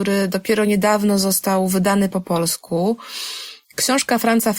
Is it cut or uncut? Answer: cut